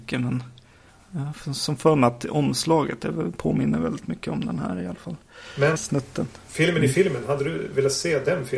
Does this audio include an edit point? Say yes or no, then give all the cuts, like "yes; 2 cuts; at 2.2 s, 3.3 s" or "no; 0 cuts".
yes; 1 cut; at 5.8 s